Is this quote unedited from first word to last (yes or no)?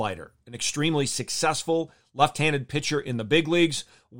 yes